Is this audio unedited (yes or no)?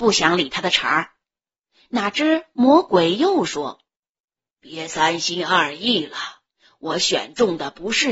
yes